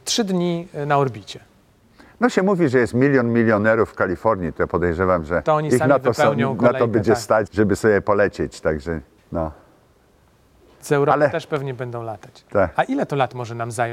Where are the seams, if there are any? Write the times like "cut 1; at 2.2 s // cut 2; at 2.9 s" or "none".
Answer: cut 1; at 5.4 s // cut 2; at 7.5 s // cut 3; at 9.2 s